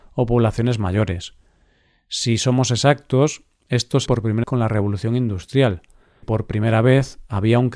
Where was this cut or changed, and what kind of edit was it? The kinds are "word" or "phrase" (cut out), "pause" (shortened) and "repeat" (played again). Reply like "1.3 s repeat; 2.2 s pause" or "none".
4.1 s word; 4.4 s word; 6.2 s word